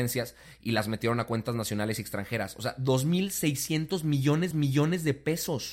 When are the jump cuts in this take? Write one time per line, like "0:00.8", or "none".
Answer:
0:04.5